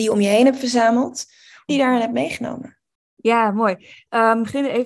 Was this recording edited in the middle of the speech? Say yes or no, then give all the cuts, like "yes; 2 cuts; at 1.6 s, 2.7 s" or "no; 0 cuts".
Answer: yes; 1 cut; at 1.7 s